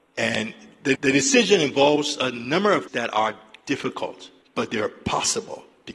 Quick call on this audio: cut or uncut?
cut